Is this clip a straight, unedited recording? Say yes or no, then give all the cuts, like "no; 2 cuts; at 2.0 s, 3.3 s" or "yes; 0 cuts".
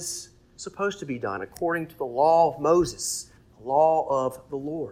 no; 1 cut; at 3.4 s